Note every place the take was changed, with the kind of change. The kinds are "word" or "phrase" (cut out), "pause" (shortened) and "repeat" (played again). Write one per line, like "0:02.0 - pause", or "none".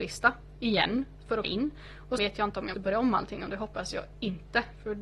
0:01.4 - word
0:02.2 - word
0:02.7 - word